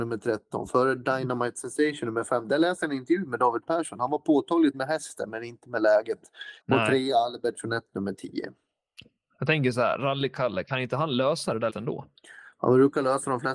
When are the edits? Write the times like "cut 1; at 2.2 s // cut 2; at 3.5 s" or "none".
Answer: cut 1; at 4.7 s // cut 2; at 6.6 s // cut 3; at 11.7 s